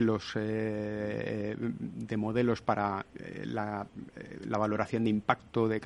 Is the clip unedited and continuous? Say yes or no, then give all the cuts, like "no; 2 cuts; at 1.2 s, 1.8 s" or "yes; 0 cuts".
no; 1 cut; at 3.1 s